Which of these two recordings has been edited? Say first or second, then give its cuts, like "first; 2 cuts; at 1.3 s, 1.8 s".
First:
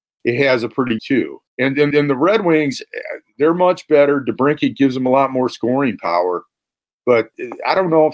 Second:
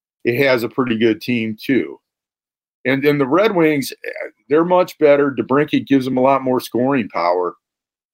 first; 3 cuts; at 1.0 s, 1.5 s, 1.9 s